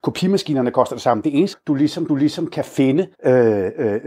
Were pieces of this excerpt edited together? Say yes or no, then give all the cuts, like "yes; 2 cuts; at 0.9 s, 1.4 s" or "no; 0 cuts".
yes; 3 cuts; at 1.5 s, 2.1 s, 3.1 s